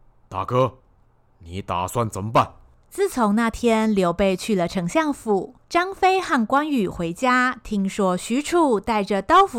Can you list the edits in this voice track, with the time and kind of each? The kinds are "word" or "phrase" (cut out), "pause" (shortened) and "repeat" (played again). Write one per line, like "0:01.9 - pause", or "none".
0:05.6 - pause